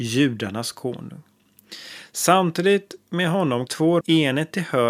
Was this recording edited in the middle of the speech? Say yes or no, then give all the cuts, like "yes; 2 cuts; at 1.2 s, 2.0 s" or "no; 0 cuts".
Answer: yes; 2 cuts; at 3.7 s, 4.0 s